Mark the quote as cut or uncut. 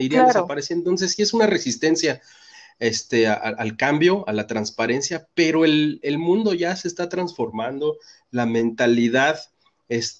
uncut